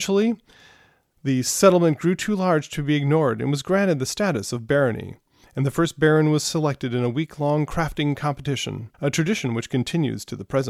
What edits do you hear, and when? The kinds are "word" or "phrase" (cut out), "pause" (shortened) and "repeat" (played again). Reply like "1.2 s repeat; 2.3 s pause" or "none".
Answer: 8.9 s pause